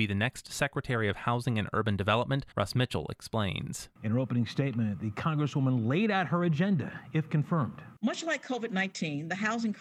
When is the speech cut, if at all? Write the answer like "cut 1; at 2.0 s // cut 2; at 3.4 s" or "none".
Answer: cut 1; at 2.5 s